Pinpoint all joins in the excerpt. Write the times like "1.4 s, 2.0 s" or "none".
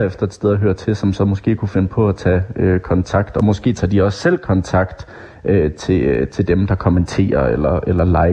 none

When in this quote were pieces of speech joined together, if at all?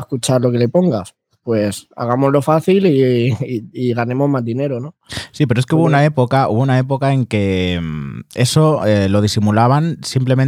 none

